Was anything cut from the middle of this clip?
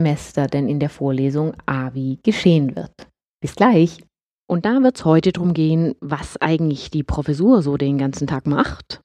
no; 0 cuts

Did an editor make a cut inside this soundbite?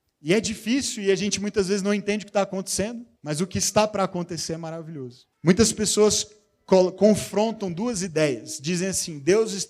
yes; 2 cuts; at 3.2 s, 5.3 s

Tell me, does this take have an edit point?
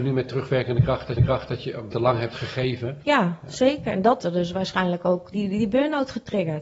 yes; 4 cuts; at 1.2 s, 1.9 s, 4.2 s, 5.3 s

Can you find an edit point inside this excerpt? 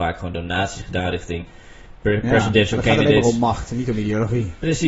no; 0 cuts

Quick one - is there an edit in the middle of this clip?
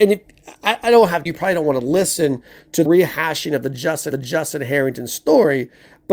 yes; 3 cuts; at 1.3 s, 2.9 s, 4.1 s

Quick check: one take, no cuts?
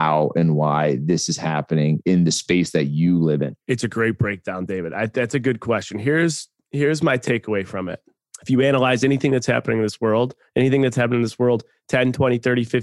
no; 1 cut; at 3.6 s

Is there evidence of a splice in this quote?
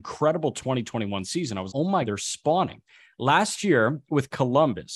yes; 2 cuts; at 1.7 s, 2.0 s

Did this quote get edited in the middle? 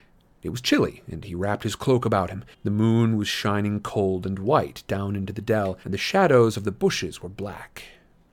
yes; 2 cuts; at 2.5 s, 5.8 s

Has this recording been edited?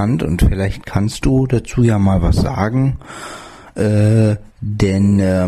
yes; 1 cut; at 4.5 s

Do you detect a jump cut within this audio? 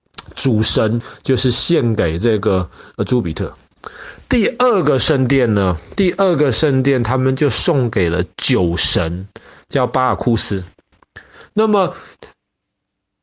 no; 0 cuts

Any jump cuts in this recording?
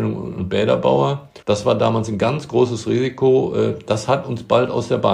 yes; 1 cut; at 1.4 s

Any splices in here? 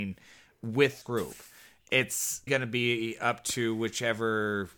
yes; 2 cuts; at 1.0 s, 2.5 s

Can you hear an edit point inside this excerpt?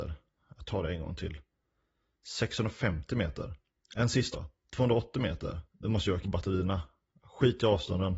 yes; 4 cuts; at 3.8 s, 4.3 s, 5.7 s, 6.2 s

